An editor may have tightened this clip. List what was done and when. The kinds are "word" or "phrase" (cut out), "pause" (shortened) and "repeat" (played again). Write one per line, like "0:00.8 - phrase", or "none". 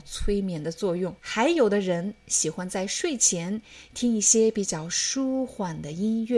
0:01.2 - pause